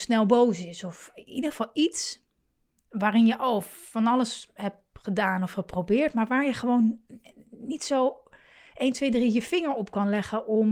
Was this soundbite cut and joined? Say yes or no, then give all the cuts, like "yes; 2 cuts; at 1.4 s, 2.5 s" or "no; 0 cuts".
no; 0 cuts